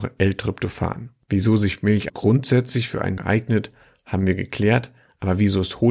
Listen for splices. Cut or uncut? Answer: cut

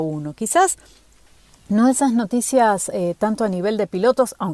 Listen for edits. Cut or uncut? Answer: uncut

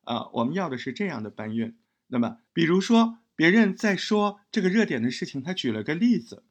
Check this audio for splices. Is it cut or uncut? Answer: cut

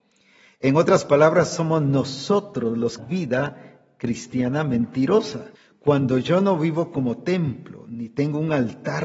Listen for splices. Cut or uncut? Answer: cut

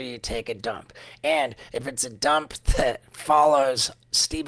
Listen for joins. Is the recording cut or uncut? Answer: uncut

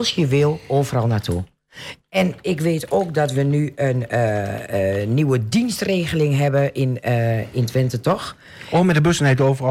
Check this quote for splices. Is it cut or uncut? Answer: uncut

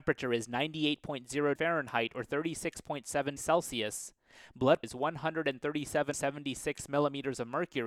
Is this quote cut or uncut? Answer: cut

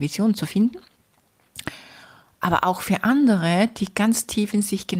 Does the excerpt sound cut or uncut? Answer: uncut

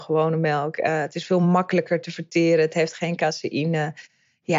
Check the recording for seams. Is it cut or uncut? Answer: uncut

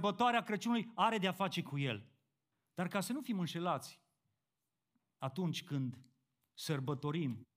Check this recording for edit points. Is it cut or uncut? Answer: cut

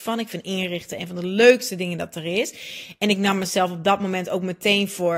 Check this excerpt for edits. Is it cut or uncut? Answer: uncut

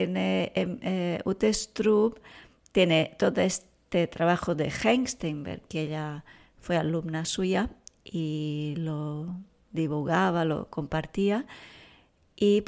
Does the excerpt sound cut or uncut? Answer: uncut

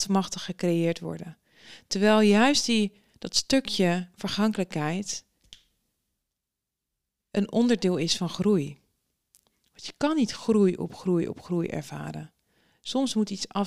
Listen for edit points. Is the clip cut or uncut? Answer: uncut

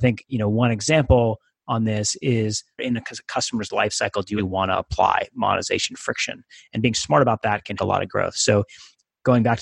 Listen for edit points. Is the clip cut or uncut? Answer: cut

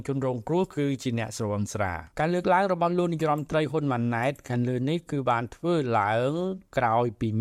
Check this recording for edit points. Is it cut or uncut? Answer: cut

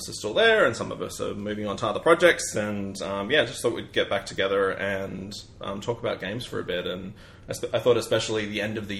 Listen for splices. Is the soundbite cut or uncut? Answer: uncut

